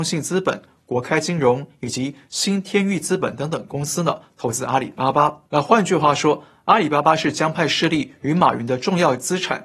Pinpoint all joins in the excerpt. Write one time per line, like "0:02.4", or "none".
0:05.5